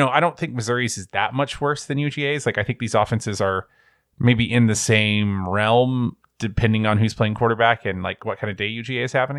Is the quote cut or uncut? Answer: uncut